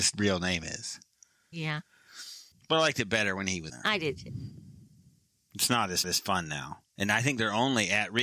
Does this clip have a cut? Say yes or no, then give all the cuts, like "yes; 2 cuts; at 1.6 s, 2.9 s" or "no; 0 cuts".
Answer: yes; 3 cuts; at 2.5 s, 3.7 s, 6.0 s